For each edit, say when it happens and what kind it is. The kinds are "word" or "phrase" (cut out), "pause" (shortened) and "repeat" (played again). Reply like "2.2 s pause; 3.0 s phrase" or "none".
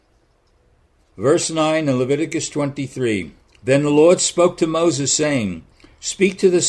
none